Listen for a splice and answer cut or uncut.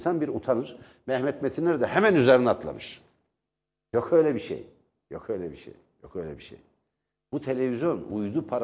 uncut